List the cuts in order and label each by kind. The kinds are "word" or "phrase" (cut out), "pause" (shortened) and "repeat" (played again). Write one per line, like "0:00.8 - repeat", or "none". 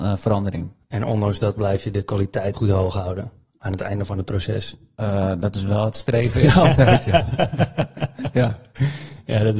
0:02.5 - word